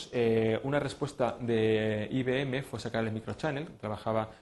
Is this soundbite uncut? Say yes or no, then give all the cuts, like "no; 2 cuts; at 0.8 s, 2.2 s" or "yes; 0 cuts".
yes; 0 cuts